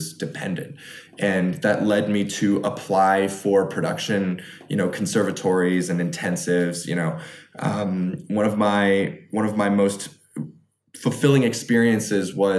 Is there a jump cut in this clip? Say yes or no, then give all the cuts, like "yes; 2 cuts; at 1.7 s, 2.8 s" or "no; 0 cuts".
no; 0 cuts